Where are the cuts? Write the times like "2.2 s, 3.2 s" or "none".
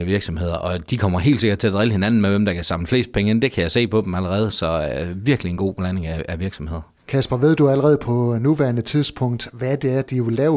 none